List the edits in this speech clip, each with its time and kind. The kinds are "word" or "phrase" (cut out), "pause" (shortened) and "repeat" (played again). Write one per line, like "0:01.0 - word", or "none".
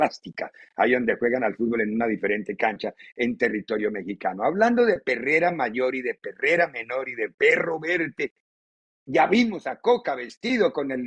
none